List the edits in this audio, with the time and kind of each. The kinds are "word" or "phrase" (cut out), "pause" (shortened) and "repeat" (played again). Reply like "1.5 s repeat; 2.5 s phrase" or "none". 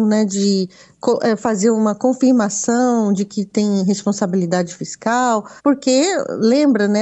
5.6 s pause